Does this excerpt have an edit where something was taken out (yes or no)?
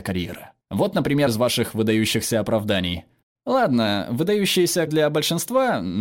yes